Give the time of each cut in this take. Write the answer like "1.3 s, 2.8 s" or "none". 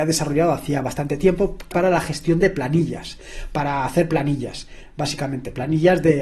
1.7 s